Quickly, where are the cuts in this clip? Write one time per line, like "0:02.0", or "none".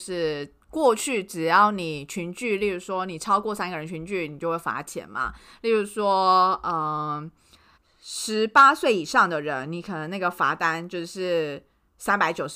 0:07.8